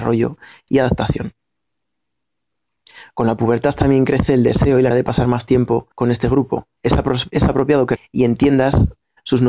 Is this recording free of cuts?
no; 4 cuts; at 4.9 s, 5.9 s, 6.8 s, 8.0 s

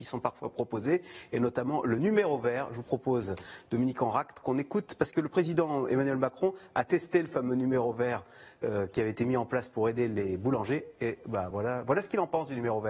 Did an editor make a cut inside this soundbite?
no; 0 cuts

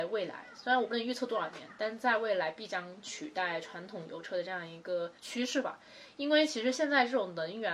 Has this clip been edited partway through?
yes; 1 cut; at 5.2 s

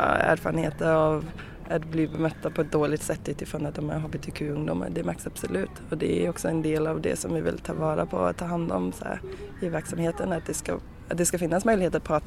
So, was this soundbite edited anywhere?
no; 0 cuts

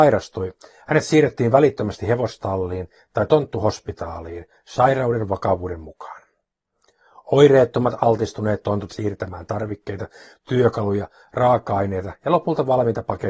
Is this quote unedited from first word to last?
no; 1 cut; at 8.9 s

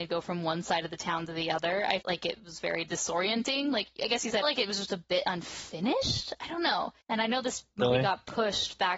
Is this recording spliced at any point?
yes; 3 cuts; at 2.0 s, 4.4 s, 7.0 s

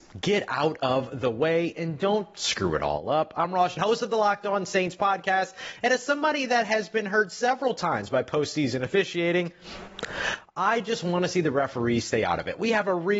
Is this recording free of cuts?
no; 1 cut; at 3.8 s

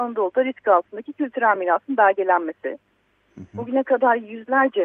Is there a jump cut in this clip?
no; 0 cuts

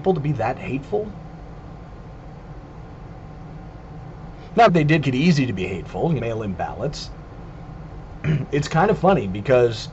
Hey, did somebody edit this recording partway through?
yes; 3 cuts; at 4.7 s, 5.0 s, 6.2 s

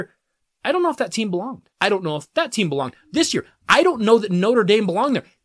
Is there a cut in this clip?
yes; 1 cut; at 1.7 s

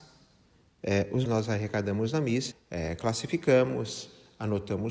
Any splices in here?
yes; 2 cuts; at 1.3 s, 2.5 s

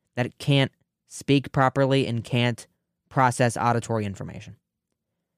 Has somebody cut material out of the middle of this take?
no; 0 cuts

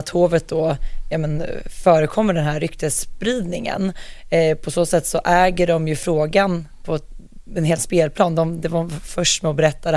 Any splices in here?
yes; 2 cuts; at 6.8 s, 7.8 s

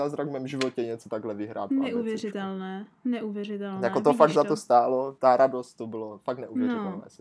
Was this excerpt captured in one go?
yes; 0 cuts

